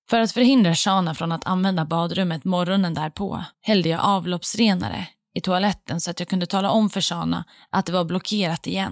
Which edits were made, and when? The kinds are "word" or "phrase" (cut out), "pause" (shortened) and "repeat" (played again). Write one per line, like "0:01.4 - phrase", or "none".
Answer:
0:03.5 - pause